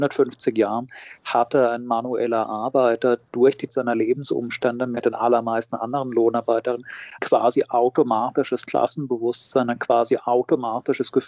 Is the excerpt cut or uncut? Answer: cut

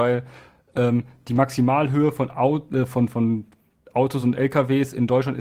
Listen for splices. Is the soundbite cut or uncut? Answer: uncut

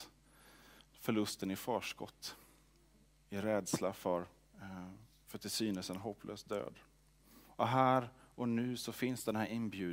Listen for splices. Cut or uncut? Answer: uncut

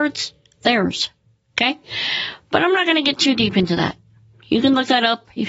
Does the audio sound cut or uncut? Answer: uncut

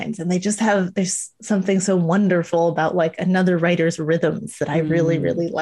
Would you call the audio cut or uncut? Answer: uncut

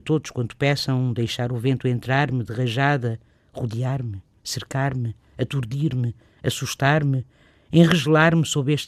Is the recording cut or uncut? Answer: uncut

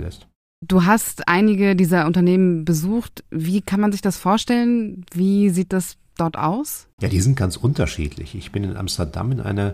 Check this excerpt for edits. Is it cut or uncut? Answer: uncut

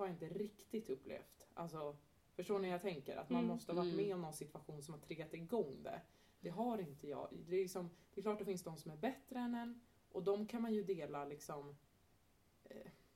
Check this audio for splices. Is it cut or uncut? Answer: uncut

